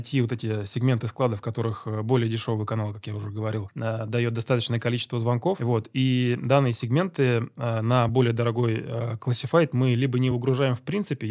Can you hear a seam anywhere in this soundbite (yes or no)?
no